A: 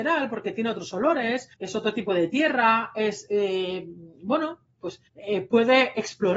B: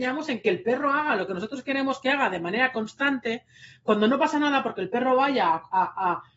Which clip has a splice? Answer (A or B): A